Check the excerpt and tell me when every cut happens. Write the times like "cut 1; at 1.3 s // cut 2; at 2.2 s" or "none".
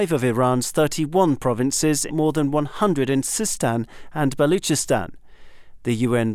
cut 1; at 2.1 s